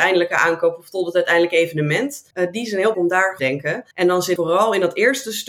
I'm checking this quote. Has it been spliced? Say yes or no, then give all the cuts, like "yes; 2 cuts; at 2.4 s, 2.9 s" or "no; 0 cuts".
yes; 5 cuts; at 2.3 s, 2.9 s, 3.4 s, 3.9 s, 4.4 s